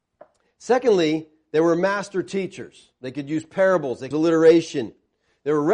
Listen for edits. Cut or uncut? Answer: cut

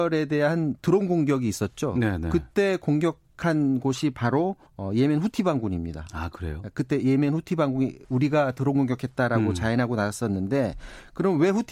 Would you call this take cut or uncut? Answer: cut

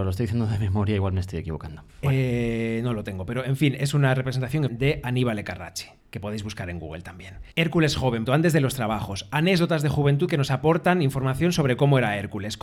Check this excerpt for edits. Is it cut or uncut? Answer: cut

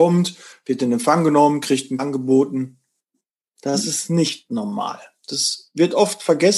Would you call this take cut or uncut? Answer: cut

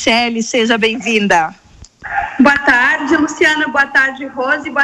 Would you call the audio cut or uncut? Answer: uncut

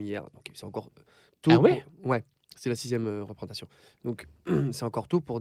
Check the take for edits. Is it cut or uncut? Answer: uncut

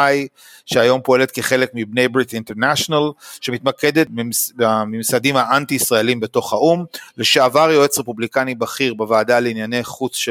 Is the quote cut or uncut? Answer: uncut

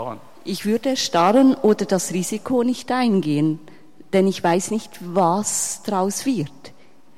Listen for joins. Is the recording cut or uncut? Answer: uncut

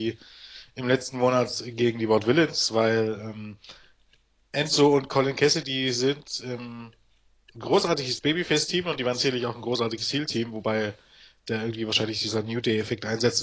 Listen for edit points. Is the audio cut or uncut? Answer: uncut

